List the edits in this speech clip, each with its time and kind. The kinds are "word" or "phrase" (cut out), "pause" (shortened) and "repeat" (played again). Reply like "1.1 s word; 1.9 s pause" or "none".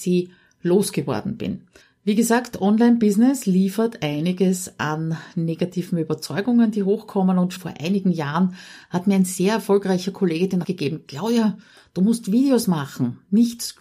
1.8 s pause; 7.6 s word; 10.6 s word